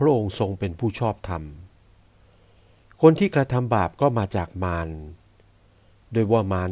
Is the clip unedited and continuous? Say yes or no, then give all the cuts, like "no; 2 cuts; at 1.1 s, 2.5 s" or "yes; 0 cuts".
yes; 0 cuts